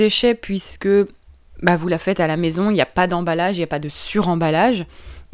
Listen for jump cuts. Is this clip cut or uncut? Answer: uncut